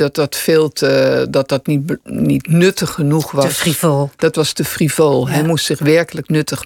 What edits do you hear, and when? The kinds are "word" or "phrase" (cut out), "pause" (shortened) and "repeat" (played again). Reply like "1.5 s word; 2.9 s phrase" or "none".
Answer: none

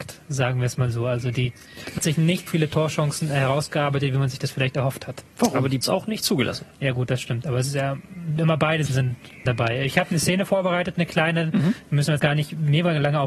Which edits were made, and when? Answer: 2.0 s word; 2.5 s word; 5.3 s pause; 5.8 s phrase; 8.9 s word; 9.5 s word; 12.2 s word

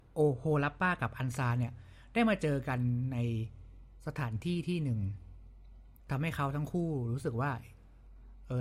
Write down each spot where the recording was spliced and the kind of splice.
6.0 s pause

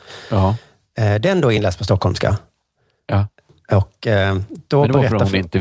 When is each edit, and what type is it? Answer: none

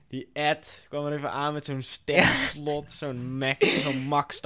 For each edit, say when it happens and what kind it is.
none

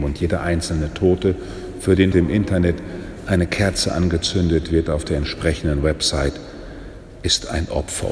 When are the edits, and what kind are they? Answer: 2.1 s word

